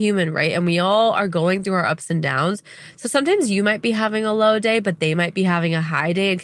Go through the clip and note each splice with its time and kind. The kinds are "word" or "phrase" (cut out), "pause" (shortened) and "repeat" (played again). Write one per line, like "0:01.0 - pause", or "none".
none

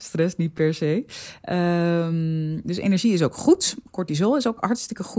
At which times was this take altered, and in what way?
none

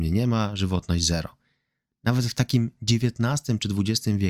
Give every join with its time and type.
none

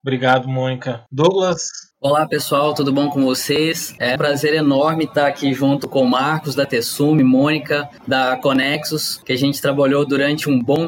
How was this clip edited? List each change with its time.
0:01.9 - pause
0:04.2 - word

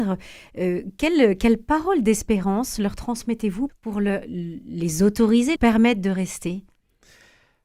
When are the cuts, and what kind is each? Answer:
0:03.7 - word
0:05.6 - word

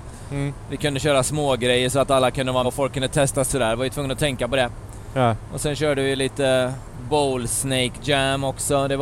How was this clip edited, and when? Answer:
0:02.6 - word
0:03.5 - phrase

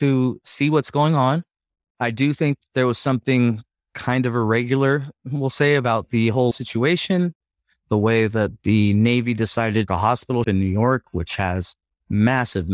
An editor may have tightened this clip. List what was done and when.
0:06.5 - word
0:09.9 - phrase
0:10.4 - word

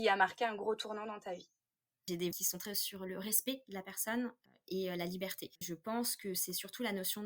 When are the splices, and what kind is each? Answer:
0:02.3 - word
0:02.7 - word
0:05.6 - word

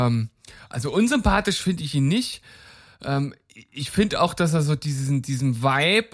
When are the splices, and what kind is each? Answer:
none

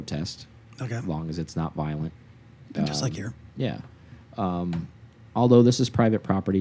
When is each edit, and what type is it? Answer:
none

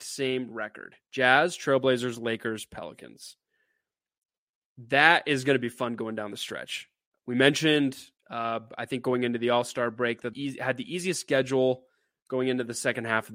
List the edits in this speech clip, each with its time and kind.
0:01.0 - pause
0:10.3 - phrase

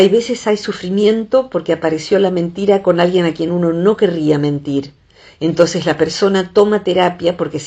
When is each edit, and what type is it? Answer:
none

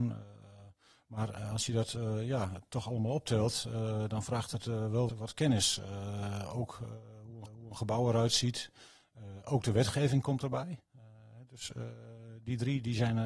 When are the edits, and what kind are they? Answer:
0:05.1 - word
0:07.5 - repeat

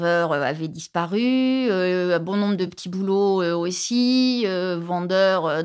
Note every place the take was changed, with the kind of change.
none

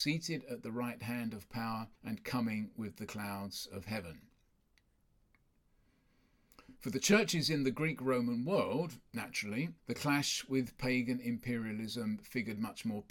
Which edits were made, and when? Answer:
0:02.0 - pause
0:09.8 - pause

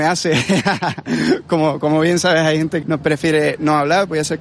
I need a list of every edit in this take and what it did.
0:02.8 - word

